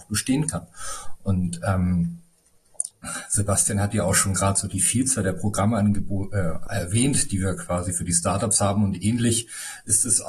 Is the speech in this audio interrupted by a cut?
no; 0 cuts

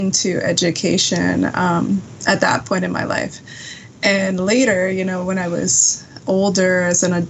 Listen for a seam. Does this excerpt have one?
no; 0 cuts

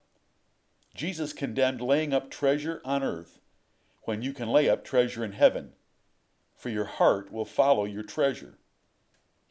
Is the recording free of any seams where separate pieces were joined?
yes; 0 cuts

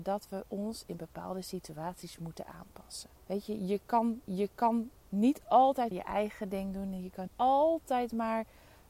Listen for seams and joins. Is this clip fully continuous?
no; 4 cuts; at 3.2 s, 4.3 s, 5.9 s, 7.3 s

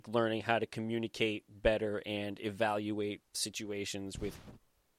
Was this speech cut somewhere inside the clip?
yes; 1 cut; at 3.3 s

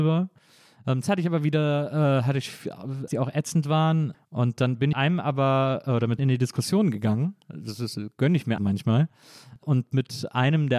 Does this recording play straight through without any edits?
no; 5 cuts; at 1.0 s, 3.1 s, 4.9 s, 6.2 s, 8.6 s

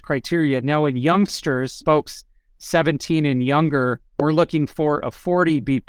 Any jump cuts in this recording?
yes; 2 cuts; at 1.8 s, 4.0 s

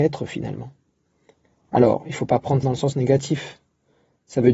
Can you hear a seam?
yes; 1 cut; at 2.6 s

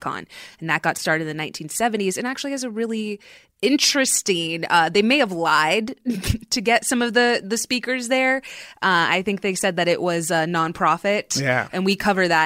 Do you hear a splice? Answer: no; 0 cuts

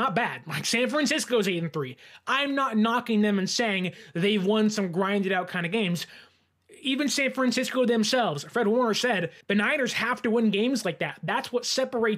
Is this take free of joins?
no; 1 cut; at 9.4 s

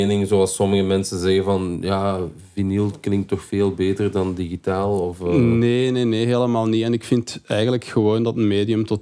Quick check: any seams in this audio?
no; 0 cuts

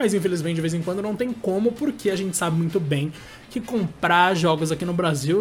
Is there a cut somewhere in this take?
no; 0 cuts

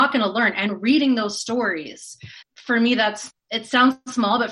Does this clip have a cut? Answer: yes; 2 cuts; at 2.4 s, 3.3 s

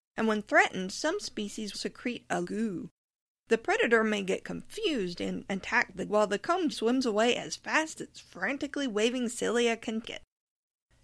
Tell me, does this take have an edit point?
yes; 6 cuts; at 1.7 s, 2.4 s, 6.1 s, 6.7 s, 8.0 s, 10.0 s

